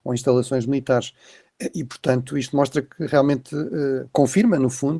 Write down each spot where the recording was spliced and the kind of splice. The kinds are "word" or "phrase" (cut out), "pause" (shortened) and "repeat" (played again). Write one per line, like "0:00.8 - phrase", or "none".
none

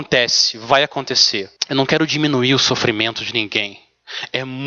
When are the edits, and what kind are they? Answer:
0:01.6 - pause

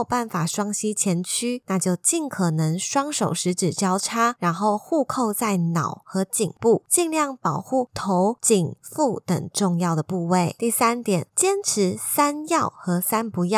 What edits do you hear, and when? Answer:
0:08.8 - word

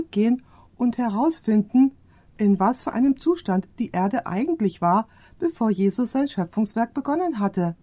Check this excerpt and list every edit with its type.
none

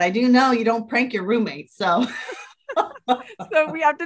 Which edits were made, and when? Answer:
none

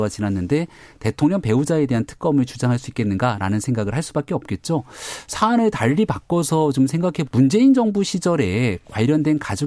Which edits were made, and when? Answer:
0:07.3 - word

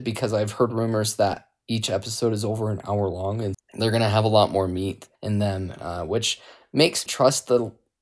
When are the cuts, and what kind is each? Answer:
0:03.5 - word
0:05.2 - pause
0:07.1 - word

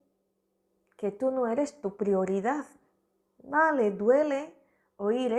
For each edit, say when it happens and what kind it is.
0:03.1 - pause

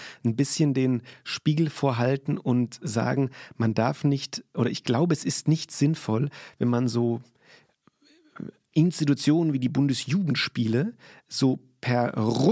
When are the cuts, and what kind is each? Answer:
none

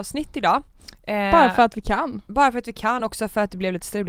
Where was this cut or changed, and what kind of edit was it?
0:03.0 - word

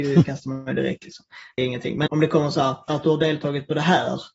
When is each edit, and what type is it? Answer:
0:01.6 - phrase
0:02.1 - word
0:02.9 - phrase

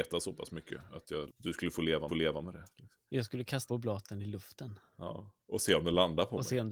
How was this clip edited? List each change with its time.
0:01.3 - word
0:02.1 - repeat
0:03.7 - word
0:04.9 - pause

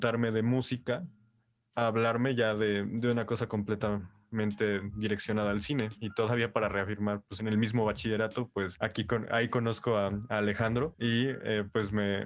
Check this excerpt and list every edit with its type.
0:07.4 - word

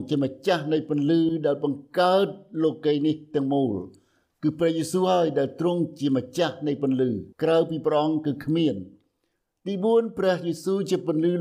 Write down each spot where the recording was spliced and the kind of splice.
0:07.3 - pause

